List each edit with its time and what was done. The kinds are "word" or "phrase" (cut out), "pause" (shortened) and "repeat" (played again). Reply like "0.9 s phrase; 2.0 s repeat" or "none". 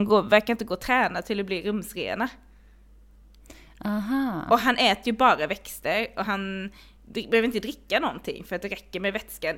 none